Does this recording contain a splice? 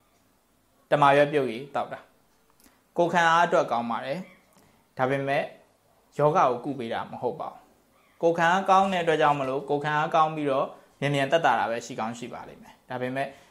no; 0 cuts

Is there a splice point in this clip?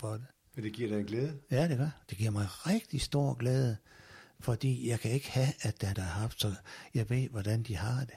yes; 1 cut; at 5.9 s

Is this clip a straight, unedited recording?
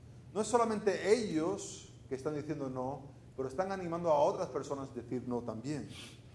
yes; 0 cuts

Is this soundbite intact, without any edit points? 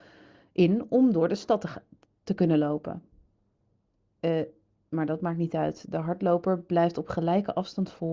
yes; 0 cuts

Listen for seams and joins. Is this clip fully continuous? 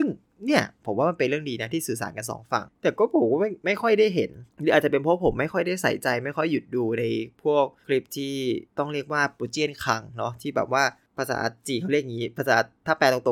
no; 1 cut; at 8.7 s

